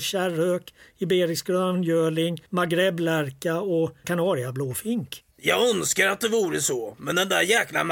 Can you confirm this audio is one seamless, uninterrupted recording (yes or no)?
no